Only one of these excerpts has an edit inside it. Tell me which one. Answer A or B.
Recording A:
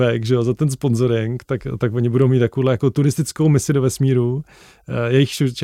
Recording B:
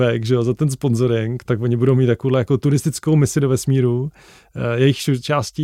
B